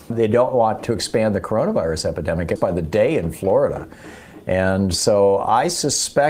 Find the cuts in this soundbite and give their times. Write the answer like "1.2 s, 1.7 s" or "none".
2.6 s